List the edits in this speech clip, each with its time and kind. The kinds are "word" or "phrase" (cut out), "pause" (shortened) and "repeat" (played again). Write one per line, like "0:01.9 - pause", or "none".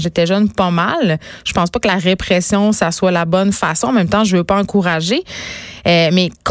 none